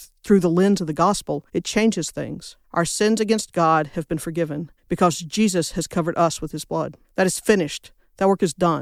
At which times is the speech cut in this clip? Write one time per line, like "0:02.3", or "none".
0:01.5
0:02.6
0:04.8
0:07.0